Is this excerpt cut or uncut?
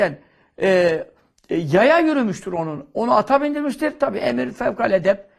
uncut